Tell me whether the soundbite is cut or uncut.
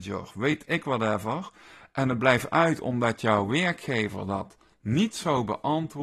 uncut